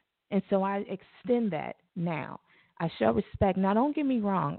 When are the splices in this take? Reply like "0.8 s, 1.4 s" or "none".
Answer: none